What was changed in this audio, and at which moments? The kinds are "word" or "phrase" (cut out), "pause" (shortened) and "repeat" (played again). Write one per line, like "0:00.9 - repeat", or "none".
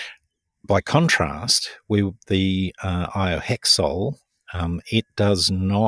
none